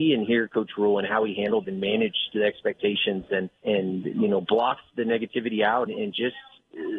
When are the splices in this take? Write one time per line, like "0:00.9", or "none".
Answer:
0:01.6
0:03.6
0:05.9